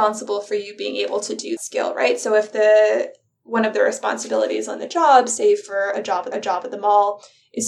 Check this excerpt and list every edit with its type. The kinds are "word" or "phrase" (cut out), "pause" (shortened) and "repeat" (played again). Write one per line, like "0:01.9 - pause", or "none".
0:01.6 - word
0:06.3 - repeat